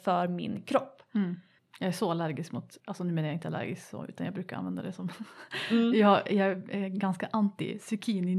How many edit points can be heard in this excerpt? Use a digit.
2